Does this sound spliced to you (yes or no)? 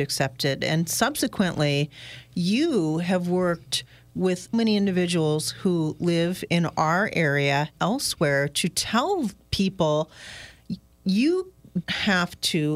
yes